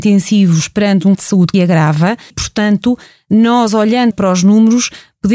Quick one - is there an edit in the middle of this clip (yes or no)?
yes